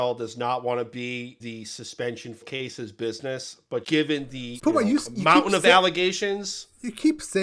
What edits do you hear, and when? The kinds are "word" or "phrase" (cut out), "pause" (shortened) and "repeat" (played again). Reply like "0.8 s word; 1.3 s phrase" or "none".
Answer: 1.4 s word; 2.4 s word; 3.8 s word; 4.6 s word